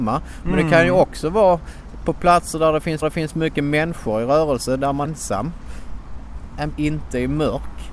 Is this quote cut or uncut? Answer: cut